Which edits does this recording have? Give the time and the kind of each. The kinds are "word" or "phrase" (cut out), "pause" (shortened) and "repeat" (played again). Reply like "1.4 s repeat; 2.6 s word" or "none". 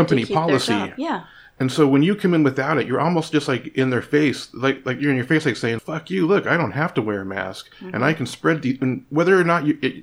5.8 s word